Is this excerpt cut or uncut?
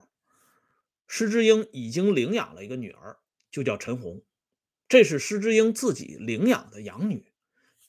uncut